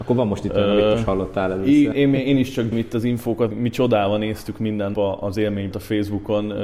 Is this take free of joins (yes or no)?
no